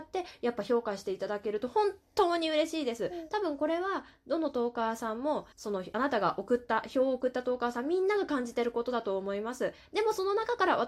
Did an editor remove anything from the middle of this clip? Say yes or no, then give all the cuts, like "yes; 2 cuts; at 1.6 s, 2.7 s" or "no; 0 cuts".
yes; 1 cut; at 5.5 s